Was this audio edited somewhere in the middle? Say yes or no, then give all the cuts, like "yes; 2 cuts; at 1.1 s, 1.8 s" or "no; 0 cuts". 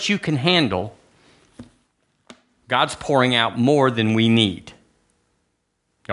no; 0 cuts